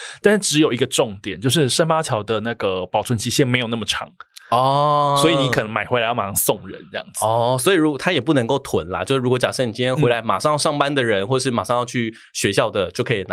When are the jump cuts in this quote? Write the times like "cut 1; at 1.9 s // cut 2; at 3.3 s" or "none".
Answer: none